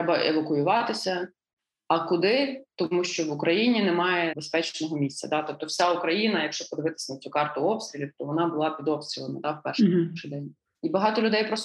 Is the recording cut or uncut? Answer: uncut